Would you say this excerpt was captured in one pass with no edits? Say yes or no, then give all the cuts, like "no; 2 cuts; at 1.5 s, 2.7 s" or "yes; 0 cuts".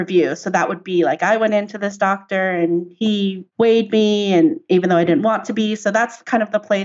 yes; 0 cuts